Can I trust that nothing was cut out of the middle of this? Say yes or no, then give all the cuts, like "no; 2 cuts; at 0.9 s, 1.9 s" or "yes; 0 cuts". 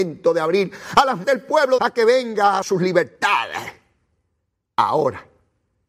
no; 3 cuts; at 1.2 s, 1.8 s, 2.6 s